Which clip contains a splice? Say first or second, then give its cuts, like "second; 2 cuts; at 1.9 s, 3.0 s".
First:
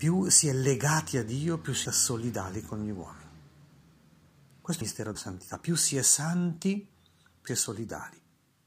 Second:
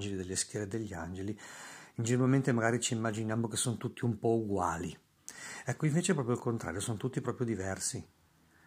first; 4 cuts; at 1.8 s, 4.8 s, 5.1 s, 7.5 s